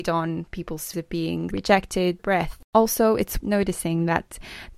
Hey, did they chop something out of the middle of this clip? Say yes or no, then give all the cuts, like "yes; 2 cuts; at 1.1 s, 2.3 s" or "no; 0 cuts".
yes; 5 cuts; at 0.9 s, 1.5 s, 2.2 s, 2.6 s, 3.4 s